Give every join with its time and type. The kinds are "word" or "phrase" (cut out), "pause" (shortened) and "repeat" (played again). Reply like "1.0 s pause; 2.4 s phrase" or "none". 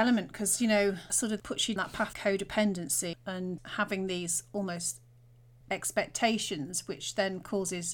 1.1 s word; 1.4 s word; 1.8 s word; 2.1 s word; 3.1 s word; 3.6 s word; 5.6 s word